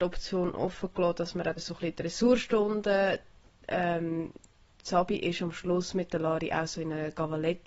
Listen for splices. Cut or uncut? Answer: cut